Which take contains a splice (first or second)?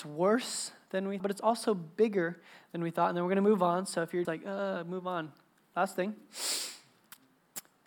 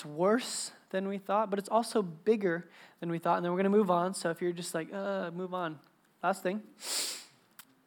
first